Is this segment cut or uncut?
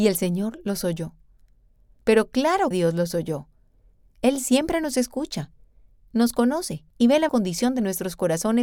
cut